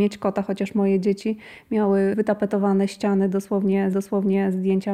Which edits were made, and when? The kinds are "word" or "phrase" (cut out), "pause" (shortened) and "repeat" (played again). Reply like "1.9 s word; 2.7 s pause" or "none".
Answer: 3.9 s repeat